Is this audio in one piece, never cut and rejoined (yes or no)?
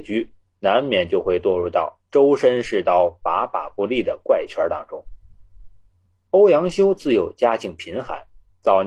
yes